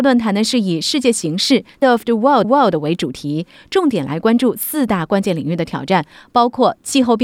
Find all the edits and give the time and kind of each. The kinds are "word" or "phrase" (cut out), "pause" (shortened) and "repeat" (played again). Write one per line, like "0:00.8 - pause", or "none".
0:01.8 - word
0:02.4 - repeat